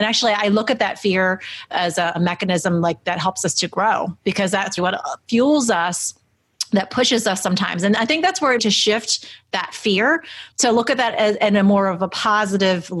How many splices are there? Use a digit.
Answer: 3